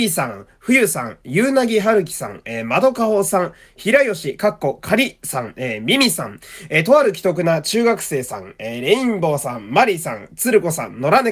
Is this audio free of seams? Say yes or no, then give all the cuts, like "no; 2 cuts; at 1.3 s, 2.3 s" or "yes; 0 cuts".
yes; 0 cuts